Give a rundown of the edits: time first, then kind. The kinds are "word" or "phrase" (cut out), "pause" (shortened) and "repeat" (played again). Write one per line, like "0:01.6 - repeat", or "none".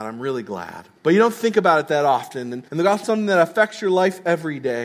0:01.0 - pause
0:02.7 - pause
0:03.0 - phrase